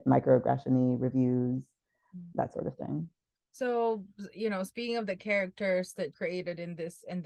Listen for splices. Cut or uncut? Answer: cut